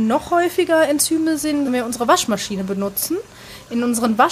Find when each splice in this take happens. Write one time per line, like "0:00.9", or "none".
0:01.7